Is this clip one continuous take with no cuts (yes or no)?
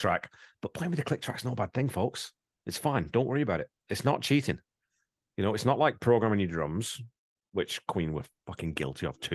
yes